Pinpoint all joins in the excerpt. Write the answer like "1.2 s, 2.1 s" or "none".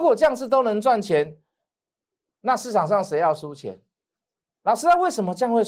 none